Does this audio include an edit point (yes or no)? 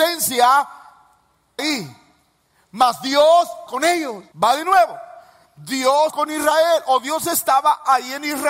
yes